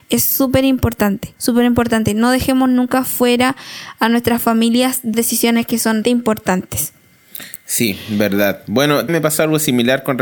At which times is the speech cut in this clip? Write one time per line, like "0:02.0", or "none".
0:01.4
0:05.1
0:06.0
0:09.1